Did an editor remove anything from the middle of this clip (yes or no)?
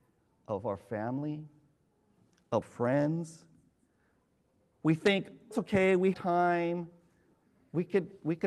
yes